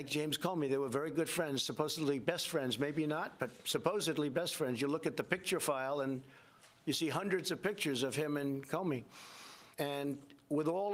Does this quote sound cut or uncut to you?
cut